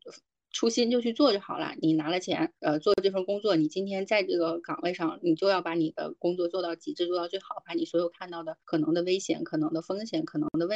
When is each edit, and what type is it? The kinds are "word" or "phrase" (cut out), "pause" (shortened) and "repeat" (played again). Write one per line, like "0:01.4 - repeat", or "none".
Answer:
0:02.6 - pause
0:08.6 - pause